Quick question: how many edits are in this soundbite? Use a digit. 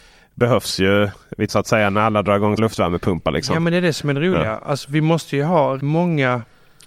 3